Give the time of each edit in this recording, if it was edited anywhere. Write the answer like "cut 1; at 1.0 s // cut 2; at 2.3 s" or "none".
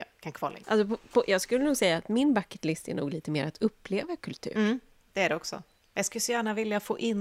none